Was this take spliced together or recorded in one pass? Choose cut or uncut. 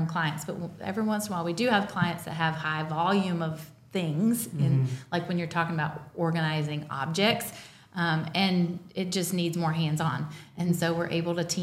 uncut